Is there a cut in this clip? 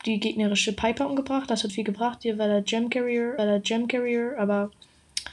yes; 2 cuts; at 1.7 s, 3.4 s

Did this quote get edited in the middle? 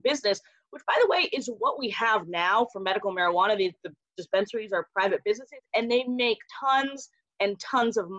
yes; 1 cut; at 6.5 s

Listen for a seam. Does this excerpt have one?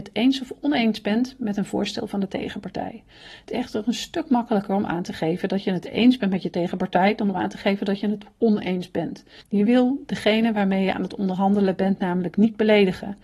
no; 0 cuts

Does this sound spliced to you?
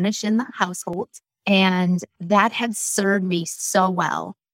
no; 0 cuts

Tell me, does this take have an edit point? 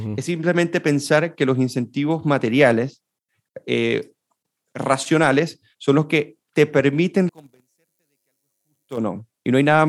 yes; 1 cut; at 7.3 s

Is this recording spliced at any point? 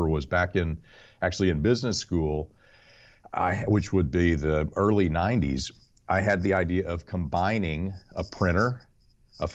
no; 0 cuts

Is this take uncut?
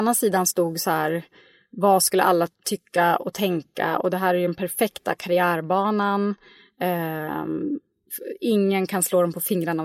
no; 1 cut; at 2.5 s

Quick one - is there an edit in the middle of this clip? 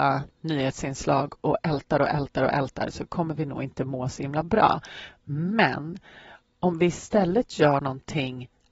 no; 0 cuts

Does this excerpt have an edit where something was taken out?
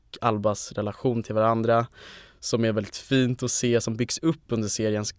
no; 0 cuts

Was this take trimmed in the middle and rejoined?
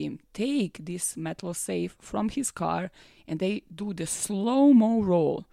no; 0 cuts

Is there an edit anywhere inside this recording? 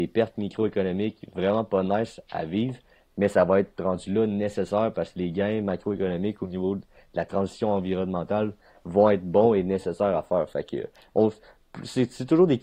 no; 0 cuts

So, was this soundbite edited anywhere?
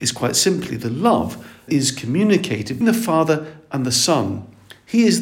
yes; 2 cuts; at 1.7 s, 2.8 s

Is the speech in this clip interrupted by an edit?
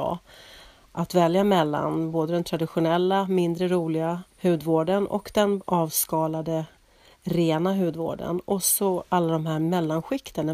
yes; 2 cuts; at 4.3 s, 5.6 s

